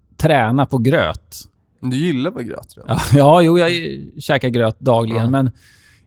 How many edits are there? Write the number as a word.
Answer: zero